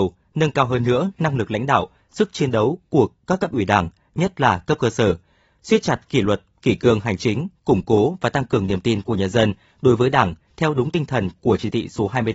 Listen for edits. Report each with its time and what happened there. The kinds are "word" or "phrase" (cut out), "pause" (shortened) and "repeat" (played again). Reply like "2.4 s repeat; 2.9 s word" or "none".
none